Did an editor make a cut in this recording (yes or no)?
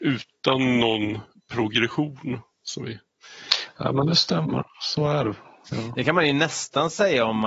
no